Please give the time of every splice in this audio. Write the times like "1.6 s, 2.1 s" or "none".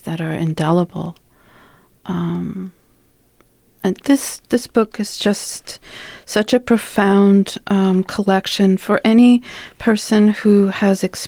none